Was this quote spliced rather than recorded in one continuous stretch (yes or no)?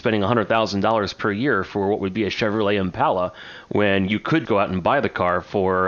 yes